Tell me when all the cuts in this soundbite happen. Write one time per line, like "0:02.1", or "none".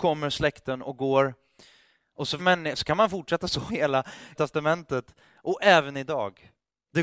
0:02.4
0:03.7
0:04.3